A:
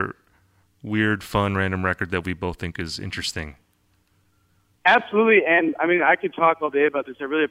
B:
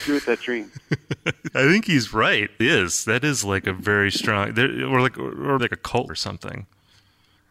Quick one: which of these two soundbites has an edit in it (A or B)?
B